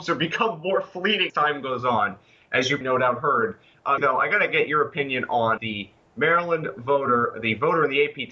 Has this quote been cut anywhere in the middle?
yes; 4 cuts; at 1.3 s, 2.8 s, 4.0 s, 5.6 s

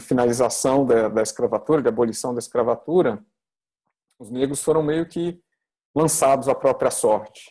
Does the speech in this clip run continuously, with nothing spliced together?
yes; 0 cuts

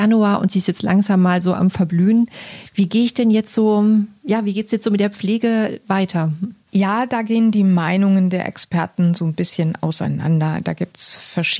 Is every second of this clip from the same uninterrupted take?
yes; 0 cuts

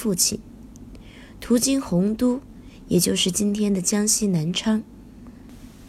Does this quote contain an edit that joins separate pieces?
no; 0 cuts

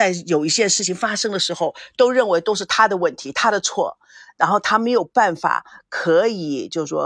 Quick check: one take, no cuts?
yes; 0 cuts

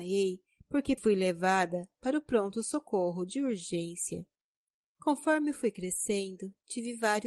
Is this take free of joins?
no; 1 cut; at 1.0 s

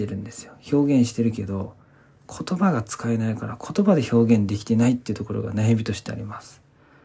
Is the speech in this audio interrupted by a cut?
no; 0 cuts

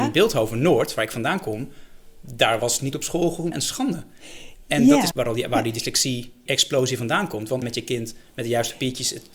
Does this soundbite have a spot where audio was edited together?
yes; 5 cuts; at 2.9 s, 3.5 s, 5.1 s, 6.5 s, 7.6 s

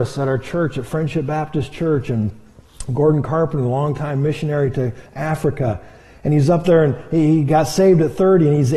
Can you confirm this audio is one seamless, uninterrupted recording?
yes; 0 cuts

